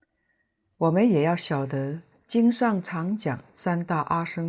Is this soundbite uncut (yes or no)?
no